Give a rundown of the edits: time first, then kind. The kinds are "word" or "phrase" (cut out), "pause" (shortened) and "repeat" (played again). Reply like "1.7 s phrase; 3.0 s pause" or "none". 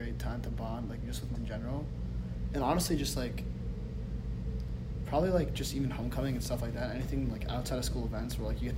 1.3 s word